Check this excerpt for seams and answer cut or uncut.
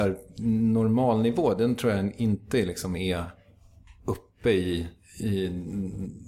uncut